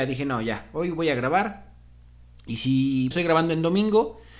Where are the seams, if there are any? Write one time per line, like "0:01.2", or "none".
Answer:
0:03.1